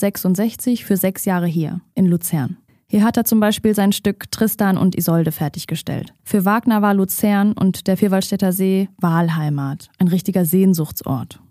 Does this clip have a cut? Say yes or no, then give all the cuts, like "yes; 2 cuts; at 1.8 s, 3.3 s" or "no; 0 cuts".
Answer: yes; 2 cuts; at 2.7 s, 6.2 s